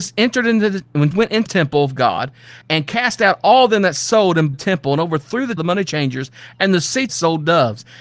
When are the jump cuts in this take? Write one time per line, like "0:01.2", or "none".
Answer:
0:01.1
0:01.5
0:02.6
0:04.5
0:05.6
0:07.1